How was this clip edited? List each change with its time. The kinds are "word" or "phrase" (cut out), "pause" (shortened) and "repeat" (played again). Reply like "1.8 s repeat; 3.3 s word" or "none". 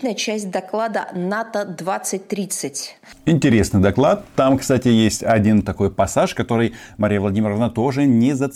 none